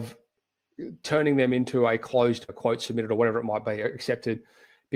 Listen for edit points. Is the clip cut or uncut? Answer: cut